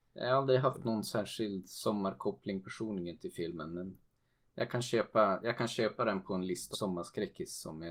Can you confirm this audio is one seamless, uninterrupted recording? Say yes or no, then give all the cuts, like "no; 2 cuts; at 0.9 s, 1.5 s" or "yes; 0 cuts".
no; 1 cut; at 6.7 s